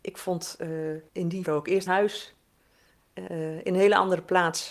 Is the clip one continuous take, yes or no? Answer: no